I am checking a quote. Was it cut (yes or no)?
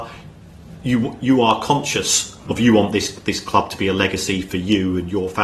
no